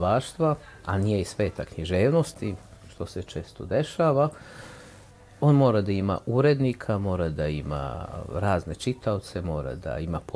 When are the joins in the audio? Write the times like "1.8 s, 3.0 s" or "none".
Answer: none

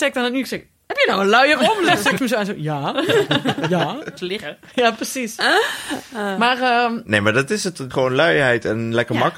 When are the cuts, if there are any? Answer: 2.2 s, 4.2 s, 7.9 s

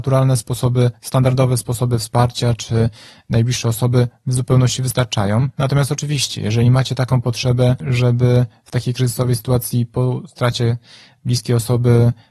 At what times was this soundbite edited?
none

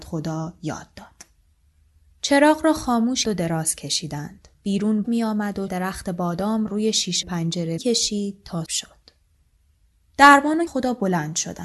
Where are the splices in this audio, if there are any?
3.2 s, 5.0 s, 5.7 s, 6.7 s, 7.2 s, 7.8 s, 8.7 s, 10.7 s

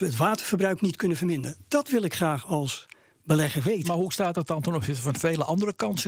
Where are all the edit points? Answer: none

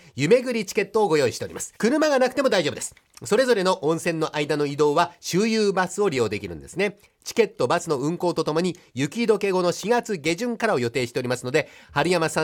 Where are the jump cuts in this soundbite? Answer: 1.8 s

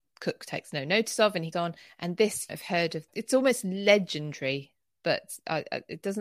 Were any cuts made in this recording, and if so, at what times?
1.5 s, 2.5 s, 3.1 s

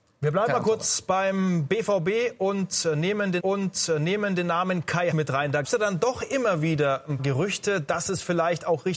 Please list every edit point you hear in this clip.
3.4 s, 5.1 s, 5.6 s, 7.2 s

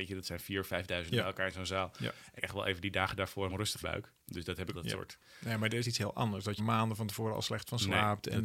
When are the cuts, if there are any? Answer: 1.1 s, 2.4 s, 3.5 s, 3.8 s, 4.7 s, 5.8 s, 6.6 s

